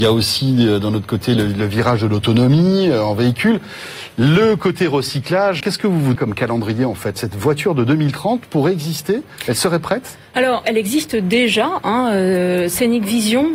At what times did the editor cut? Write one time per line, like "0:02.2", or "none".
0:05.6
0:06.2
0:10.6